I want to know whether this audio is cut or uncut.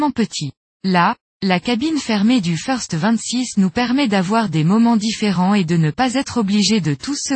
uncut